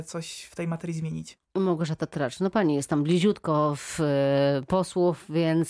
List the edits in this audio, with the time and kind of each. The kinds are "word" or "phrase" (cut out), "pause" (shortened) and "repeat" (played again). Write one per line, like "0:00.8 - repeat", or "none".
none